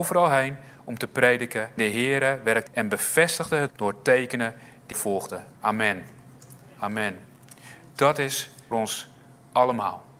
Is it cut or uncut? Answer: cut